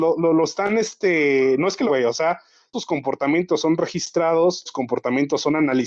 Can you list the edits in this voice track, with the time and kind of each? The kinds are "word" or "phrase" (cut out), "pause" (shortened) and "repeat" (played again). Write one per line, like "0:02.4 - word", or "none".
0:01.9 - word
0:02.7 - word
0:04.7 - word